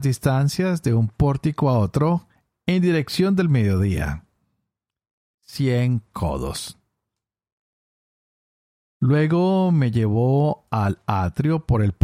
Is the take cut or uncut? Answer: uncut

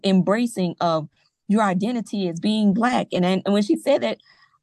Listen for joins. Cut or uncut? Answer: uncut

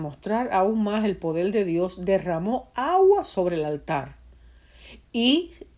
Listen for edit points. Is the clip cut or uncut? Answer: uncut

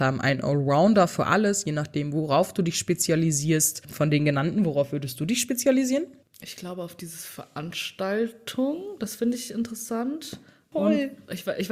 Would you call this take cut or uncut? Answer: uncut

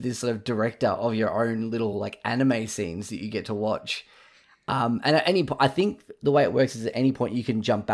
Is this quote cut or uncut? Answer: uncut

